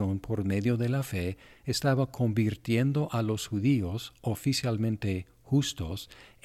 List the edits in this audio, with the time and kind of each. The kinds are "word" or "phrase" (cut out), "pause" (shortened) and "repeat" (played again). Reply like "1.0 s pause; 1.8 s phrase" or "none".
none